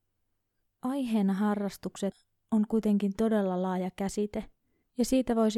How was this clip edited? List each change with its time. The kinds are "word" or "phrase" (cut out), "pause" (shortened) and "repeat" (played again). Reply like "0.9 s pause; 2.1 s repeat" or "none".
none